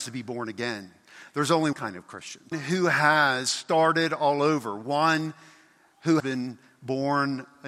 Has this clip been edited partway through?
yes; 3 cuts; at 1.7 s, 2.5 s, 6.2 s

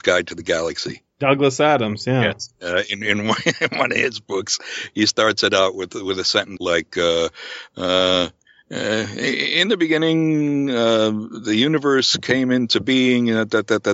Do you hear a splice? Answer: yes; 1 cut; at 6.6 s

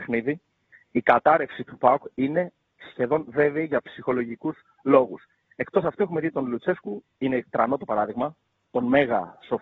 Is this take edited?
no; 0 cuts

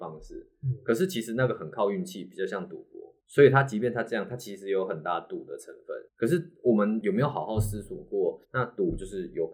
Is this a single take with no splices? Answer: no; 3 cuts; at 3.2 s, 6.1 s, 8.4 s

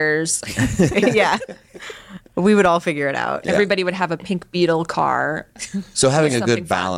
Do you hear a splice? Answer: no; 0 cuts

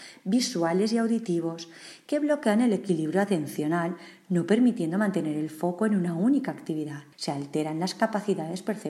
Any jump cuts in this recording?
yes; 1 cut; at 7.1 s

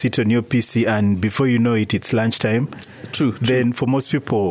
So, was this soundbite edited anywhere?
no; 0 cuts

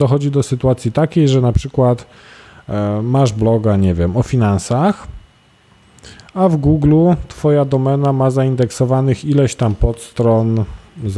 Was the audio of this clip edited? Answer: no; 0 cuts

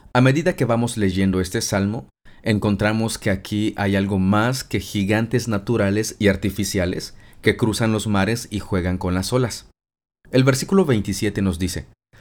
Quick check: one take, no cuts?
yes; 0 cuts

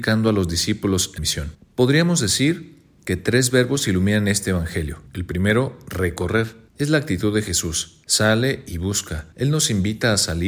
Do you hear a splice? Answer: yes; 5 cuts; at 1.2 s, 5.1 s, 6.7 s, 8.0 s, 9.3 s

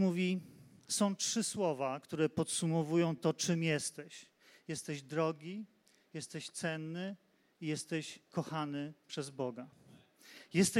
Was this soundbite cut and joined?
no; 0 cuts

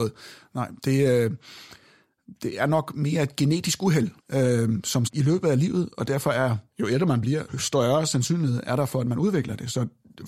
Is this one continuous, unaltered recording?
no; 5 cuts; at 4.2 s, 5.1 s, 6.7 s, 7.5 s, 8.6 s

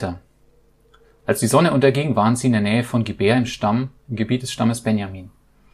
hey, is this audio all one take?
yes; 0 cuts

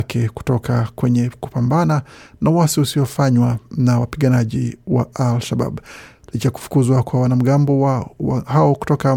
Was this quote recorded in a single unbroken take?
yes; 0 cuts

